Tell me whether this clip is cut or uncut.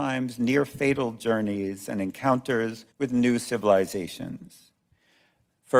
cut